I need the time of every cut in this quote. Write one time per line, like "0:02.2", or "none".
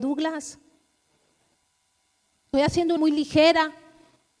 0:02.5
0:03.0